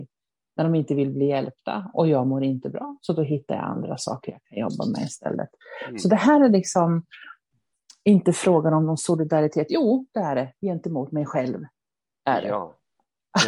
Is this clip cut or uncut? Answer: uncut